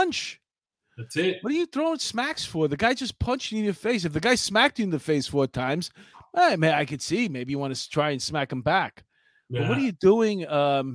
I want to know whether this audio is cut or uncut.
uncut